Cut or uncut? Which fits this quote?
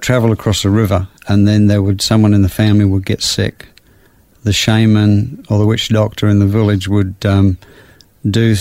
uncut